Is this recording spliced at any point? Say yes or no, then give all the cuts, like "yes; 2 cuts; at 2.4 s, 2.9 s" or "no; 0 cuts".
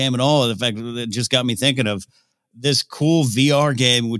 no; 0 cuts